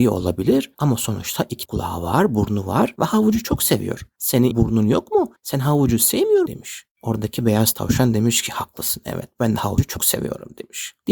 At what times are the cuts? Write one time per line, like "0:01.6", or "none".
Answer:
0:01.7
0:04.5
0:05.4
0:06.5